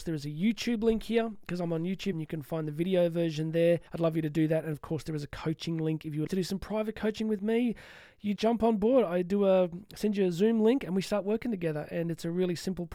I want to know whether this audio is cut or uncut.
cut